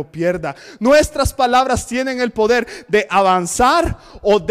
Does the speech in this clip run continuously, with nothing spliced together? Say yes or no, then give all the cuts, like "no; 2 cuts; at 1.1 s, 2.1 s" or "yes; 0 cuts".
yes; 0 cuts